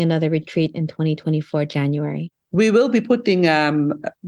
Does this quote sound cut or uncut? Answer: uncut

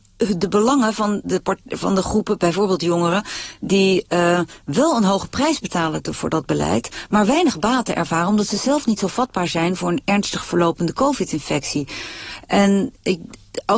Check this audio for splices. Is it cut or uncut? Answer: cut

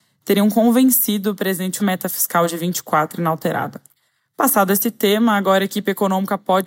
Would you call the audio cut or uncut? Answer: cut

